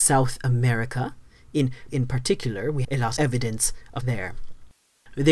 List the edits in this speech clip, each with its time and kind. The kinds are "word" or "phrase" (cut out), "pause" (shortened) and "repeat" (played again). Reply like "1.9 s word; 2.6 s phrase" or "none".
1.9 s word; 2.8 s word; 3.2 s word; 4.0 s word